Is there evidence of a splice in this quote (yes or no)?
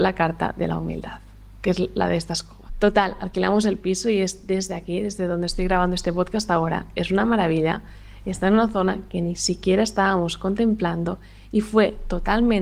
no